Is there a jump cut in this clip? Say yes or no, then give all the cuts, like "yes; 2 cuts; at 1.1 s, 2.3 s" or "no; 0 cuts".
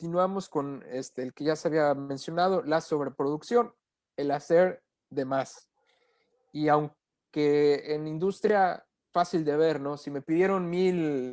no; 0 cuts